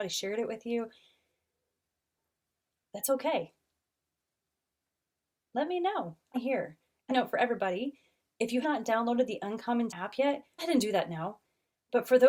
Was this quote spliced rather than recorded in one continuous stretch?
yes; 5 cuts; at 6.3 s, 7.1 s, 8.6 s, 9.9 s, 10.6 s

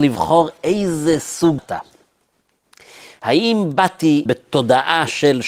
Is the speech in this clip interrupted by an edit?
yes; 2 cuts; at 1.6 s, 4.3 s

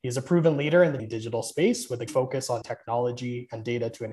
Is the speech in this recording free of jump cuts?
no; 3 cuts; at 1.0 s, 2.1 s, 2.6 s

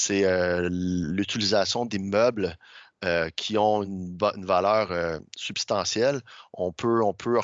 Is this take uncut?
yes; 0 cuts

